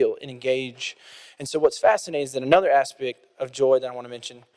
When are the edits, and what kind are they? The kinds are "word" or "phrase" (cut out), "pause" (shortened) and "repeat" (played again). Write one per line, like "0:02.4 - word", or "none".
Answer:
none